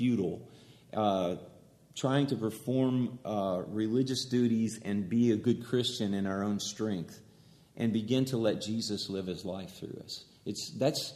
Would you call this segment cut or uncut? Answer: uncut